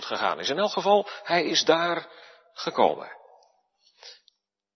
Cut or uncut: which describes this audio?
uncut